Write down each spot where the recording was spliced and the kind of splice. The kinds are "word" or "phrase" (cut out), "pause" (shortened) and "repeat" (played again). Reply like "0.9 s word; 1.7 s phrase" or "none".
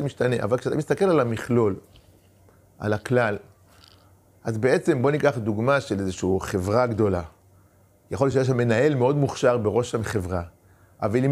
none